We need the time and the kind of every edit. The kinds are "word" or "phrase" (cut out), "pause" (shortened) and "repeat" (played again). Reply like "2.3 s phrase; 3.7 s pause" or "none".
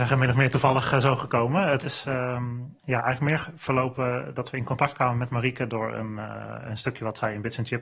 2.8 s pause